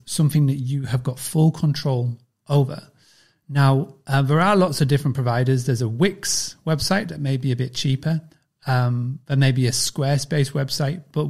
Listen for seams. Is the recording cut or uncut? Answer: uncut